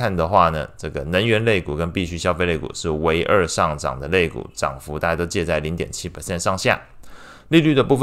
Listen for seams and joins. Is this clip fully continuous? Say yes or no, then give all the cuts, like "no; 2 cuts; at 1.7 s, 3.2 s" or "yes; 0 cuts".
yes; 0 cuts